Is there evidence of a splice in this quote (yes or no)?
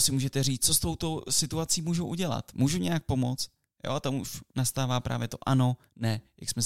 no